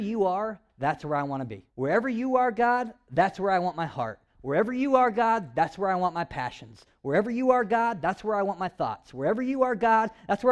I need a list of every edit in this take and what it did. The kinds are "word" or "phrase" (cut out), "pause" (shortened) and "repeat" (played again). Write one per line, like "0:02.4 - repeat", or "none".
0:01.7 - pause